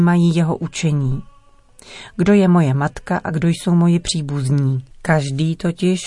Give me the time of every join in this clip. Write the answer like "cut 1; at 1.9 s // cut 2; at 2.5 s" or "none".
cut 1; at 4.9 s